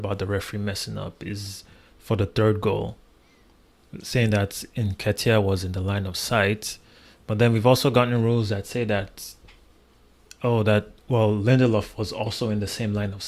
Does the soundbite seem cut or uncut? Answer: uncut